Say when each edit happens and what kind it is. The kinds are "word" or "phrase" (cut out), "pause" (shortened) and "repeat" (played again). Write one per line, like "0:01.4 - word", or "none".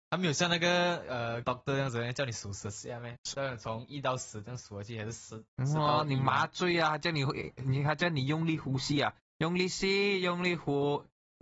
0:01.4 - word
0:03.2 - word
0:05.5 - pause